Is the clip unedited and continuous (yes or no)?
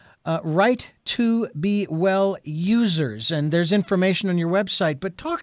yes